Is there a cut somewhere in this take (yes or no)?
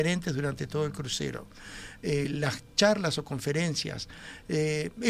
no